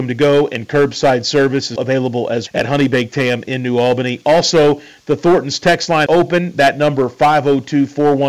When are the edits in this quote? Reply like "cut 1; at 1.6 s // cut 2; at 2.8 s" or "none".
cut 1; at 1.8 s // cut 2; at 2.5 s // cut 3; at 6.1 s